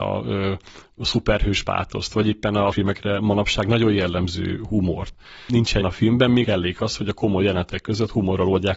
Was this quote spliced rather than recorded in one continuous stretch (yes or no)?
yes